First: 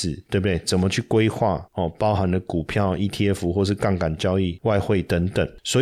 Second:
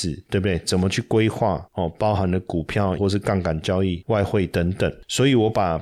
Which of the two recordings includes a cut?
second; 1 cut; at 3.0 s

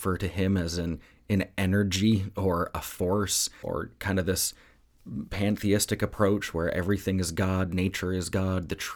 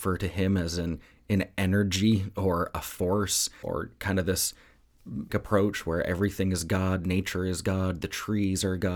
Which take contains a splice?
second; 1 cut; at 5.3 s

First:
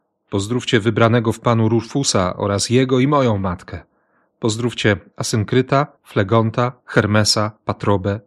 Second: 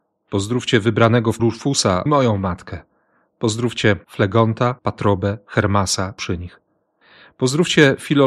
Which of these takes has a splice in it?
second; 5 cuts; at 1.4 s, 2.1 s, 4.0 s, 4.8 s, 6.2 s

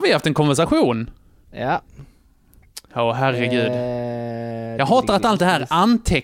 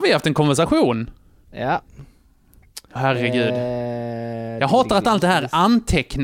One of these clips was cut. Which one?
second; 1 cut; at 3.0 s

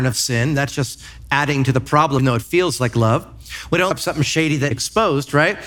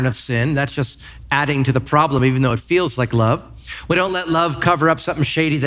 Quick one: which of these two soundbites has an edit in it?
first; 3 cuts; at 2.2 s, 3.9 s, 4.7 s

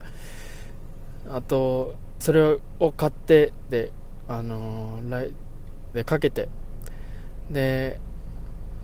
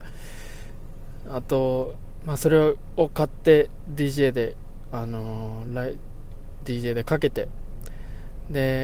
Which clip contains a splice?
first; 3 cuts; at 2.2 s, 3.7 s, 5.9 s

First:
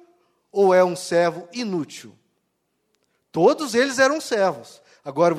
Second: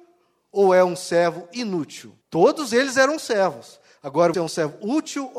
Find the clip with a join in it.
second; 2 cuts; at 2.2 s, 4.3 s

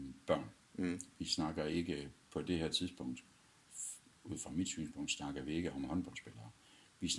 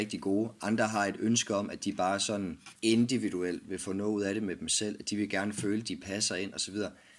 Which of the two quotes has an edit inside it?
second; 1 cut; at 2.8 s

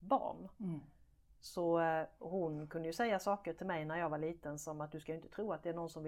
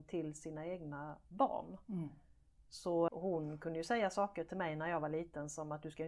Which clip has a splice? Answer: second; 1 cut; at 3.1 s

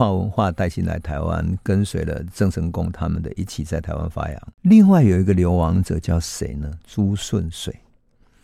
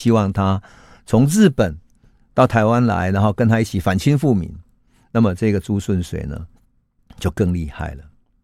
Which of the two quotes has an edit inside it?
first; 1 cut; at 4.5 s

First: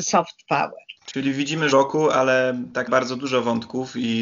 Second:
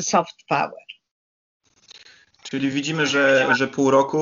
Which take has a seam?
first; 3 cuts; at 1.0 s, 1.7 s, 2.9 s

